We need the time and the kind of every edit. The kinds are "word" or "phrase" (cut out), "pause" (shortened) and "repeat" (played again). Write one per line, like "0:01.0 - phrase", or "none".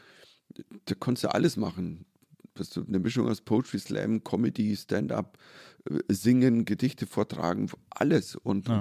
none